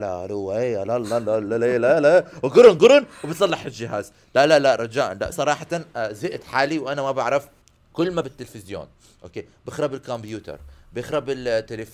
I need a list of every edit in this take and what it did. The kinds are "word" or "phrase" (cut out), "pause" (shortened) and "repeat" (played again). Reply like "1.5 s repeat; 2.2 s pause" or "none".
2.8 s word; 5.3 s phrase; 7.6 s pause; 8.2 s phrase